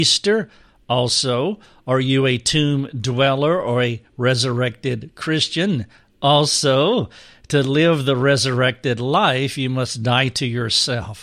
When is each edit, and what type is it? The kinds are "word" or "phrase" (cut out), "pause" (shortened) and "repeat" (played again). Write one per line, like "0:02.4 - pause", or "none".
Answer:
none